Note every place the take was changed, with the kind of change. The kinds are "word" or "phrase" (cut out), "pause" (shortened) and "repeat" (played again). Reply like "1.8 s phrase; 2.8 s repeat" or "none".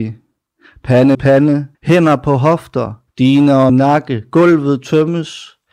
1.1 s word; 1.7 s pause; 3.1 s pause; 3.7 s word